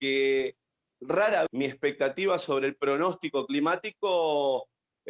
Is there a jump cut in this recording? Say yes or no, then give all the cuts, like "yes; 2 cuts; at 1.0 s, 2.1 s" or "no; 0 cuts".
yes; 1 cut; at 1.5 s